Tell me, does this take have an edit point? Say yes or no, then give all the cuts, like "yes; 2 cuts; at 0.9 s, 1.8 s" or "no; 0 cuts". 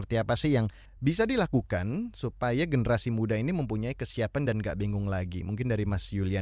no; 0 cuts